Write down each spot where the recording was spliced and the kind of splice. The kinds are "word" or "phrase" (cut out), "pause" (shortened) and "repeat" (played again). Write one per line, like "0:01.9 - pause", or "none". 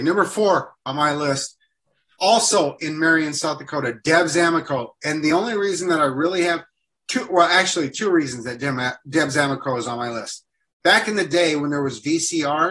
none

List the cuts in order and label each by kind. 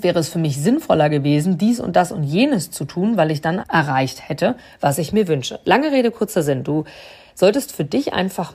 0:03.6 - phrase

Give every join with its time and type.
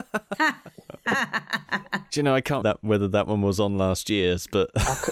0:02.6 - word

